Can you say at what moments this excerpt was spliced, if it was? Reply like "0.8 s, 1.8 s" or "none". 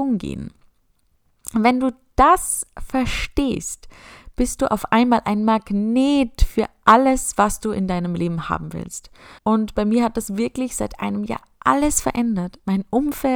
9.4 s